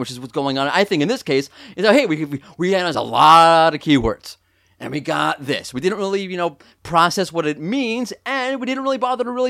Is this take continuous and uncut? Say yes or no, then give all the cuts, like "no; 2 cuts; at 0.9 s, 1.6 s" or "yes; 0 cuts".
yes; 0 cuts